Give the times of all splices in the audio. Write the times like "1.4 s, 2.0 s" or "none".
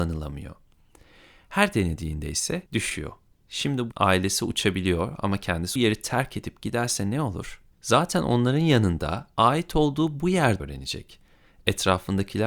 2.7 s, 3.9 s, 5.8 s, 7.7 s, 10.6 s